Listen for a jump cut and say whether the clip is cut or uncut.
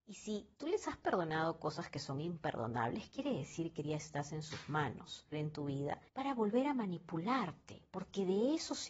cut